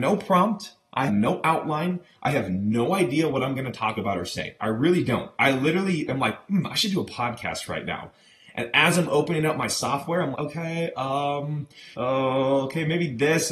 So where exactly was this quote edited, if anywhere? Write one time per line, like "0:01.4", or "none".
0:01.1
0:10.3
0:11.9